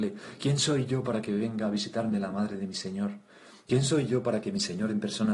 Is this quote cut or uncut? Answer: uncut